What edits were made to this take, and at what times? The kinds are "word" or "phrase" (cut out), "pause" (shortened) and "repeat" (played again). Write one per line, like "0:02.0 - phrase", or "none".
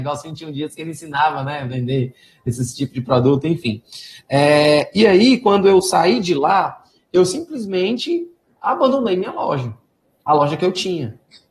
none